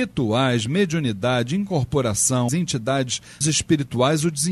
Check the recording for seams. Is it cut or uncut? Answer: cut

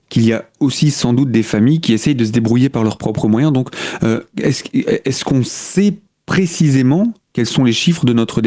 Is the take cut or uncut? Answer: uncut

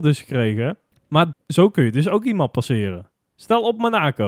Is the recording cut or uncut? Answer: cut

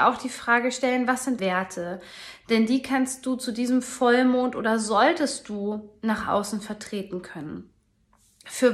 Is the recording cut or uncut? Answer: cut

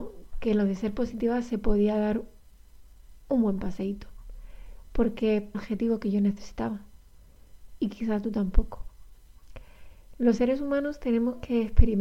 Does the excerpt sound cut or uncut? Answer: cut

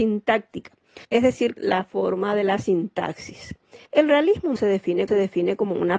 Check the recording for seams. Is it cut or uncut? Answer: cut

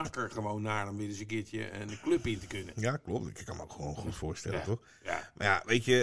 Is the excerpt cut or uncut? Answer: uncut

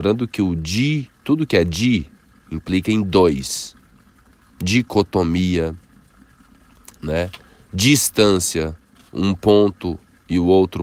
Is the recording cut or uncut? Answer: uncut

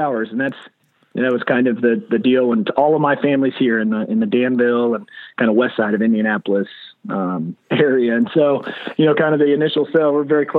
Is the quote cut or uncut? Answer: uncut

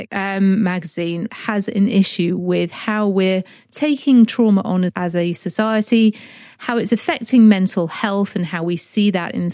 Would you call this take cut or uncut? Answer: cut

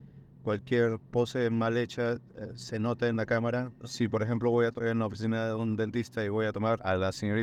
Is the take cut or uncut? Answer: uncut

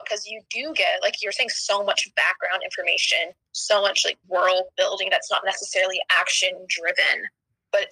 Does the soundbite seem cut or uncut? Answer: cut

